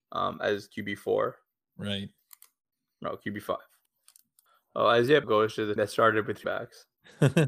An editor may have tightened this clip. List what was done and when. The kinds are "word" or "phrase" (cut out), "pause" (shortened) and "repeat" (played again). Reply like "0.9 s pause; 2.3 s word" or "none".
5.2 s word; 5.8 s word; 6.4 s word